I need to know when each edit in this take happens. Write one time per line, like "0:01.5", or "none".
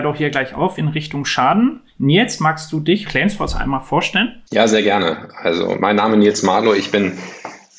0:01.9
0:03.1
0:04.5